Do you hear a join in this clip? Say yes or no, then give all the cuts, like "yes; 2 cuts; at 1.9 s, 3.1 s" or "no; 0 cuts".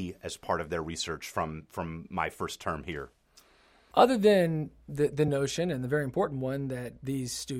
no; 0 cuts